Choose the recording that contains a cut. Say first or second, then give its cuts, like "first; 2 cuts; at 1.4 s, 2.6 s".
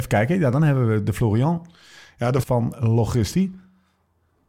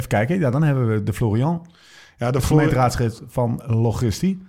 first; 1 cut; at 2.4 s